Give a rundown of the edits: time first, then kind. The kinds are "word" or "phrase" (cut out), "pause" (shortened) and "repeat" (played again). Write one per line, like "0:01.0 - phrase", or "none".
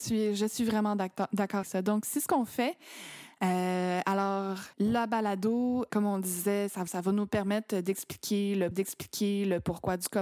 0:01.6 - word
0:04.7 - pause
0:05.9 - word
0:06.9 - word
0:08.7 - repeat